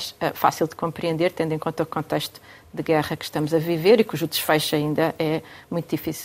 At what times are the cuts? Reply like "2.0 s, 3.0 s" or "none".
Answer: none